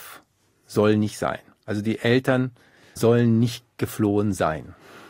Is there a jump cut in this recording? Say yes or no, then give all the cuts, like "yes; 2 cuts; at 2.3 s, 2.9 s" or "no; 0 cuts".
no; 0 cuts